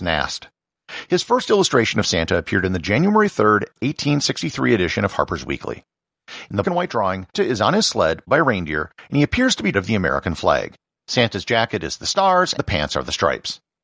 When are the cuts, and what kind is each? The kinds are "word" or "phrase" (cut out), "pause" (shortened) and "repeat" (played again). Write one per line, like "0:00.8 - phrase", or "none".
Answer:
0:06.6 - word
0:07.3 - word
0:08.3 - word
0:09.7 - phrase
0:10.9 - pause
0:12.6 - word